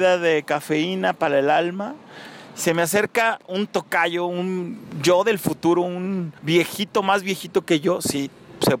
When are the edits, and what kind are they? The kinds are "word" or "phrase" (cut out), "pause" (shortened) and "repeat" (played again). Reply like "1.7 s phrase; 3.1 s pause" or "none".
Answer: 6.4 s pause